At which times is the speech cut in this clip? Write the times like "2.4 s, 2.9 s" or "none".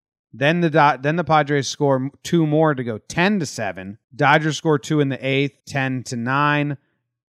4.0 s, 5.6 s

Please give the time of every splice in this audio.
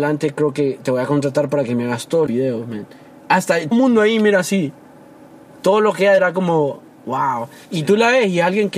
2.3 s, 3.7 s, 6.2 s, 7.6 s

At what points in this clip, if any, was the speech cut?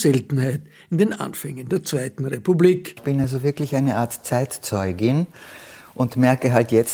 none

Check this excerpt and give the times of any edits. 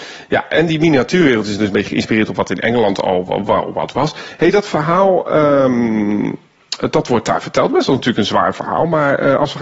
none

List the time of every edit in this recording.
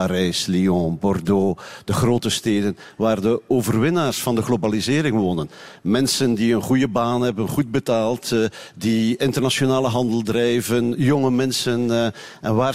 none

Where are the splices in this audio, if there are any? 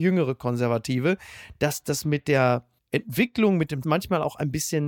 2.8 s, 3.8 s

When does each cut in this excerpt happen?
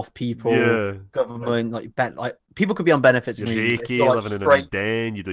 3.5 s

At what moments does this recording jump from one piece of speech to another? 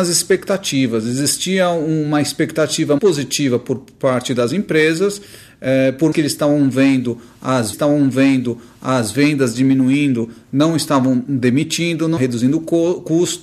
3.0 s, 6.1 s, 7.7 s, 12.2 s

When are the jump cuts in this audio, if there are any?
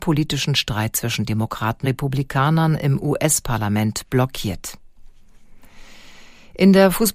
1.8 s

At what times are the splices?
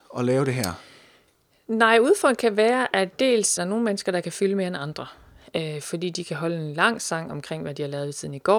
3.6 s

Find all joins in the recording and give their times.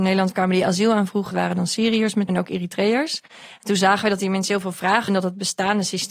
1.3 s, 2.3 s, 5.1 s

